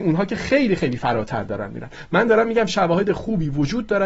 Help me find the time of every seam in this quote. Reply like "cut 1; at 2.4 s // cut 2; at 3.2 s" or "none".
none